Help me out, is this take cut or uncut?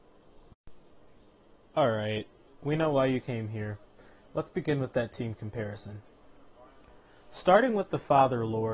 uncut